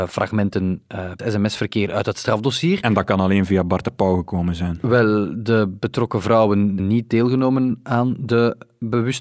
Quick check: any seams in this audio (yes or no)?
yes